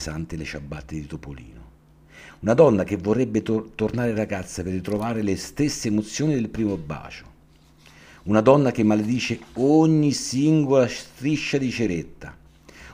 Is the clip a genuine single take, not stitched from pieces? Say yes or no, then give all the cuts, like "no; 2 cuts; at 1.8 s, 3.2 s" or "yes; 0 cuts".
yes; 0 cuts